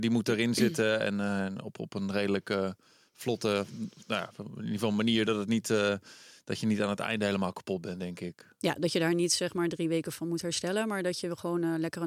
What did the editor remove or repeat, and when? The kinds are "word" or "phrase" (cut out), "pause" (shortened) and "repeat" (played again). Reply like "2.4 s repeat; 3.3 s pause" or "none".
none